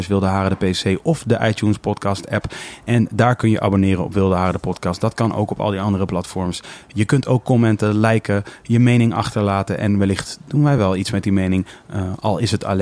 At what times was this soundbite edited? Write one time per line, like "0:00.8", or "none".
none